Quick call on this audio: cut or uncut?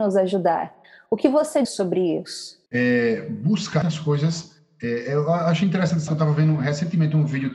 cut